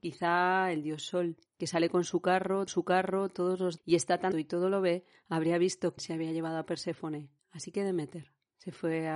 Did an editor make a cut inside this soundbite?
yes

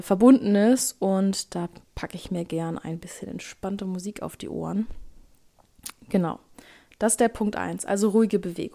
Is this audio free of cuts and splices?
yes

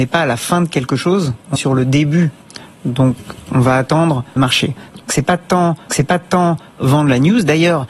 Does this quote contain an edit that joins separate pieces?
yes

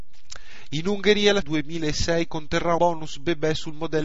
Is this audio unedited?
no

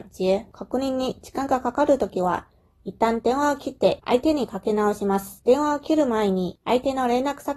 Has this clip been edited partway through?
no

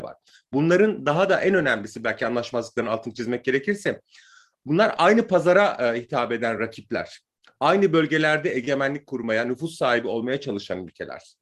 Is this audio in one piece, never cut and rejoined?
yes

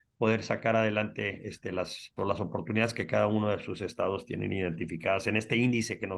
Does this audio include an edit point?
yes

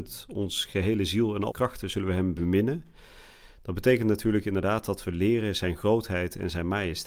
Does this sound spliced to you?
yes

